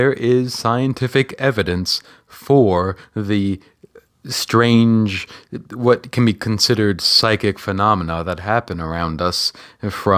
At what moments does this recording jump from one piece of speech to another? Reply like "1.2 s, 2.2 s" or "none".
none